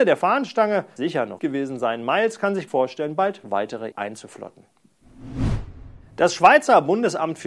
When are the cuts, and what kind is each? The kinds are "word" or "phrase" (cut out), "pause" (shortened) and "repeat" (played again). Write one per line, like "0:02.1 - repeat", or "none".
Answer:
0:01.0 - phrase
0:01.4 - word
0:02.7 - word
0:03.9 - word